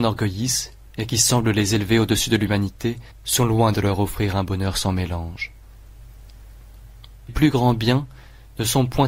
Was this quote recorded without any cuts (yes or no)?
no